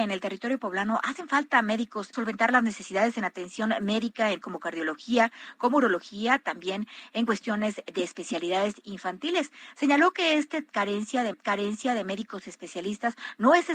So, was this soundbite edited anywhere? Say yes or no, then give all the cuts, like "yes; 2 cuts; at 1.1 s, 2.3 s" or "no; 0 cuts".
yes; 3 cuts; at 2.1 s, 4.4 s, 11.3 s